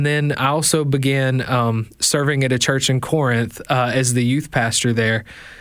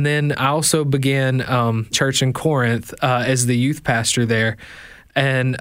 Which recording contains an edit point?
second; 1 cut; at 1.9 s

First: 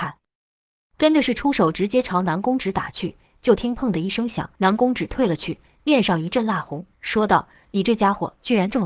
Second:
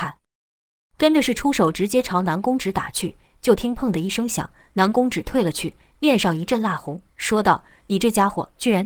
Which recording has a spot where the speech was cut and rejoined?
first; 1 cut; at 4.6 s

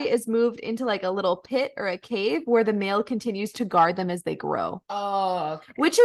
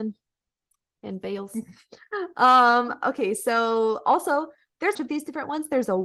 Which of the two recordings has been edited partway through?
second; 1 cut; at 4.9 s

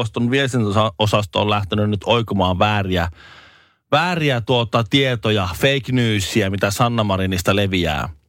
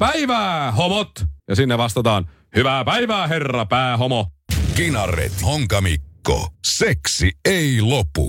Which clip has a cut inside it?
second; 3 cuts; at 1.4 s, 5.4 s, 6.5 s

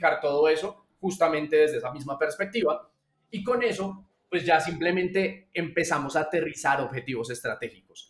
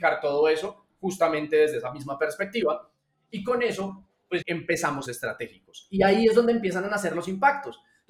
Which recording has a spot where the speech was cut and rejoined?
second; 2 cuts; at 4.4 s, 5.1 s

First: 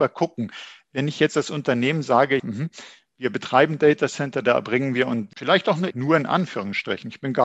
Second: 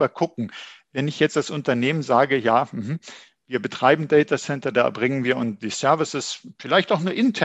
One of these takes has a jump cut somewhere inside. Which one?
first; 3 cuts; at 2.4 s, 5.3 s, 5.9 s

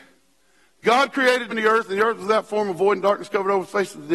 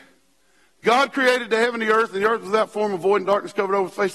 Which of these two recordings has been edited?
first; 1 cut; at 1.5 s

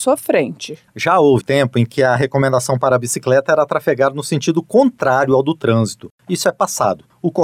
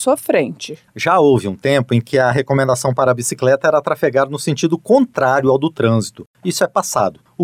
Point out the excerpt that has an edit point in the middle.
first; 1 cut; at 1.4 s

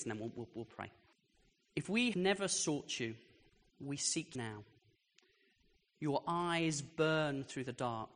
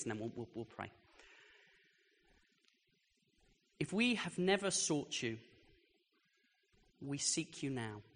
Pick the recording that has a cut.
first; 4 cuts; at 1.1 s, 2.1 s, 3.5 s, 4.3 s

